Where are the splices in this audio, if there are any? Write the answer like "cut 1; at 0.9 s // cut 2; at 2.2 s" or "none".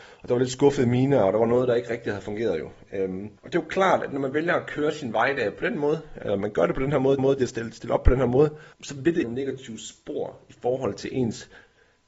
cut 1; at 3.4 s // cut 2; at 7.2 s // cut 3; at 8.7 s // cut 4; at 9.2 s